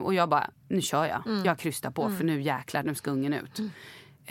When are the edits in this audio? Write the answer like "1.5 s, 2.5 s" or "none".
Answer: none